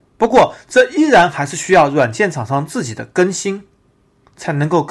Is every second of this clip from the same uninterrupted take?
yes; 0 cuts

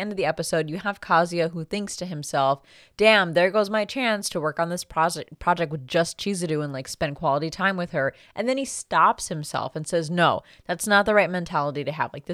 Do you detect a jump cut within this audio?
no; 0 cuts

